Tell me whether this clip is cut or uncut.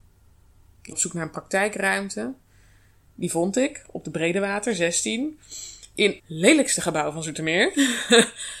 cut